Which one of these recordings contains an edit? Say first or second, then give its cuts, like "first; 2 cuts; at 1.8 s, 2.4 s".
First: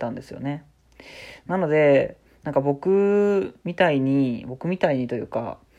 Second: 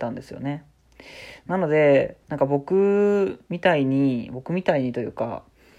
second; 1 cut; at 2.2 s